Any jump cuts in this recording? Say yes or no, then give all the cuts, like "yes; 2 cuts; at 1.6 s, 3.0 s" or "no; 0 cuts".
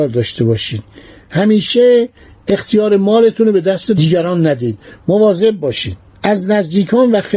no; 0 cuts